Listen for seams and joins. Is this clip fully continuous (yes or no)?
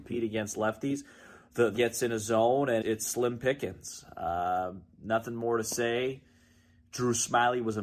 no